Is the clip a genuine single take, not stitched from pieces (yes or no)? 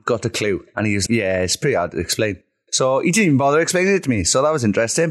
no